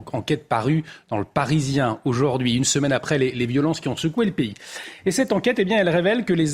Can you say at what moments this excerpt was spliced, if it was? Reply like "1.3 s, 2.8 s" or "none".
none